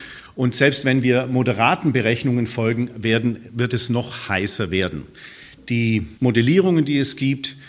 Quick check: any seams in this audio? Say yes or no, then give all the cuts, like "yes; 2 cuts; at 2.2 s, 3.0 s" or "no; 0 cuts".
yes; 1 cut; at 6.2 s